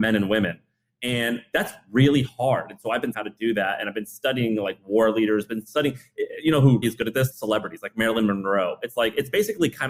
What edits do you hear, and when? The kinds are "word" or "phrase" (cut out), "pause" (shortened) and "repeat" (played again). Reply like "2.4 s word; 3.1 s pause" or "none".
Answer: 3.1 s word; 6.8 s word; 7.3 s word